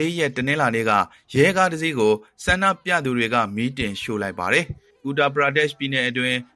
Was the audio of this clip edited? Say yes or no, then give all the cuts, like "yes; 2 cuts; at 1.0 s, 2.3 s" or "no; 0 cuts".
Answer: no; 0 cuts